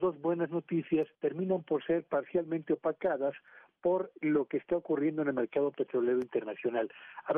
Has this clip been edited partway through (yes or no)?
yes